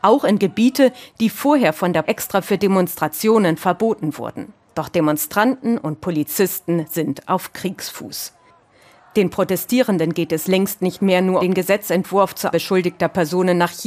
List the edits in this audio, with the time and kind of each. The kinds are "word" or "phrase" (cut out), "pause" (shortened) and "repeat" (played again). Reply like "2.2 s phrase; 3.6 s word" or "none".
2.0 s word; 4.6 s pause; 11.4 s word; 12.5 s word